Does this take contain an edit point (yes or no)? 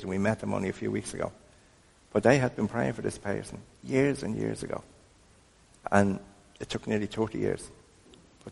no